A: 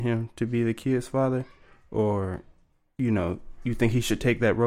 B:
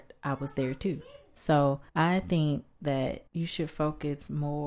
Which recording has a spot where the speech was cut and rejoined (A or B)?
B